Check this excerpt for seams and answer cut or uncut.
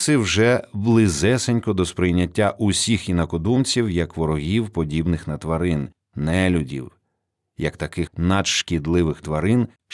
cut